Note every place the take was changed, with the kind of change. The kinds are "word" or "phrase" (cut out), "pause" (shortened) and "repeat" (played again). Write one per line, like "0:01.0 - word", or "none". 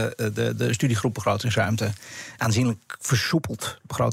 0:02.4 - word